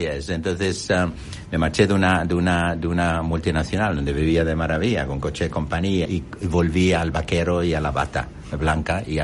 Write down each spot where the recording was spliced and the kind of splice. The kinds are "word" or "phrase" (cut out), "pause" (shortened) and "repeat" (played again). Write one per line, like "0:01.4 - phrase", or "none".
0:06.1 - phrase